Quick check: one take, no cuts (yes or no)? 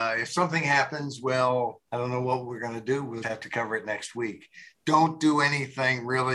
no